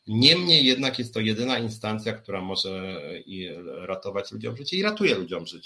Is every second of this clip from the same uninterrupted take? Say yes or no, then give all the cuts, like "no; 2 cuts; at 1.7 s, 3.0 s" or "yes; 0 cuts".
yes; 0 cuts